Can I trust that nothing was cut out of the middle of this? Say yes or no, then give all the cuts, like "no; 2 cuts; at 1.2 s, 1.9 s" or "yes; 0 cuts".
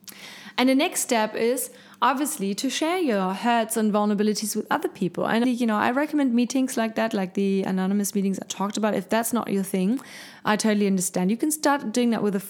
no; 1 cut; at 5.4 s